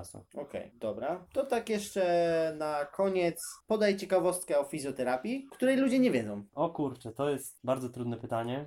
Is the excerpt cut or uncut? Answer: uncut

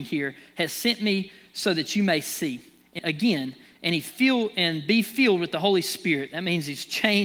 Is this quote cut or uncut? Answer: cut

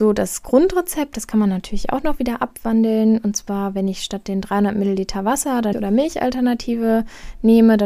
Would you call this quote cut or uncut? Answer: cut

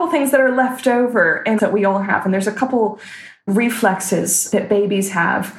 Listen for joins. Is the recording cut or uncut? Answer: cut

